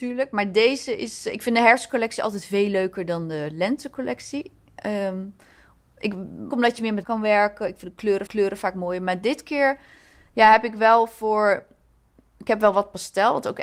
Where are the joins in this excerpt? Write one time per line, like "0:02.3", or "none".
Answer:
0:06.5
0:07.0
0:08.3